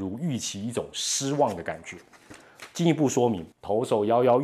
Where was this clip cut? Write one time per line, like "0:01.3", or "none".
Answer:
0:03.5